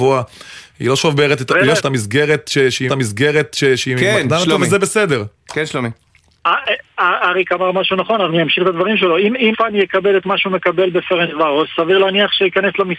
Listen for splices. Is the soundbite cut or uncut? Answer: cut